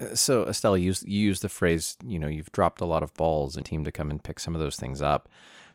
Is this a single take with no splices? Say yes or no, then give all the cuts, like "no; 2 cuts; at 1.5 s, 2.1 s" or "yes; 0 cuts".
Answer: no; 1 cut; at 3.6 s